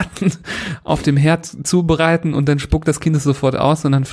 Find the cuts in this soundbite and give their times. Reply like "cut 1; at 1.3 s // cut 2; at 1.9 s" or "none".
none

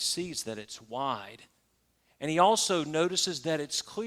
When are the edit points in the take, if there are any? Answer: none

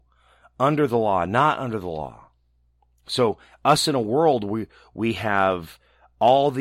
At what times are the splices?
cut 1; at 2.7 s

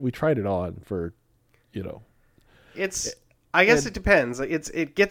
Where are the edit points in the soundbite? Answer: none

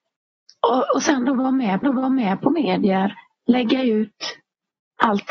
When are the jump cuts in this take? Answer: cut 1; at 1.8 s

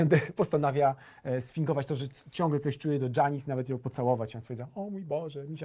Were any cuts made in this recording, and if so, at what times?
none

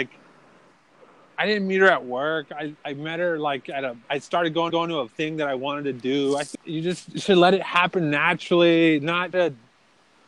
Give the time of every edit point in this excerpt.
cut 1; at 4.0 s // cut 2; at 4.7 s // cut 3; at 6.5 s // cut 4; at 9.3 s

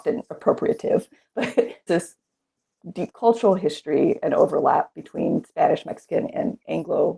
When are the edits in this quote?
cut 1; at 1.9 s

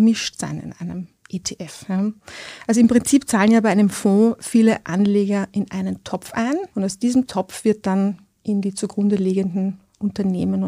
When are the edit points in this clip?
cut 1; at 6.7 s

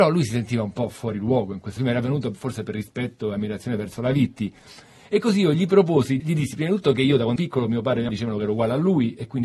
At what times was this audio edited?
cut 1; at 1.8 s // cut 2; at 6.2 s // cut 3; at 7.4 s // cut 4; at 8.1 s

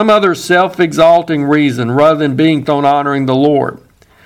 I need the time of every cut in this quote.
cut 1; at 2.6 s

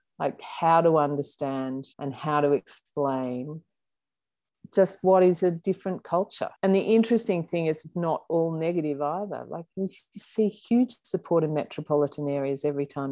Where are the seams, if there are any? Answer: cut 1; at 1.9 s // cut 2; at 6.6 s

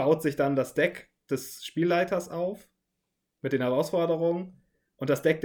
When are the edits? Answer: none

